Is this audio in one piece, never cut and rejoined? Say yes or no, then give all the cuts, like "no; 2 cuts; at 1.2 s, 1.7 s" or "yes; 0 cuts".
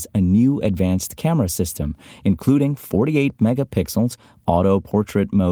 yes; 0 cuts